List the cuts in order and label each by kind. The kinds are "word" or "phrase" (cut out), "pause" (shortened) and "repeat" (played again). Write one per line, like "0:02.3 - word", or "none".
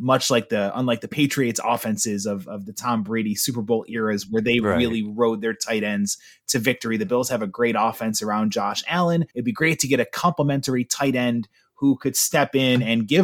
0:09.3 - pause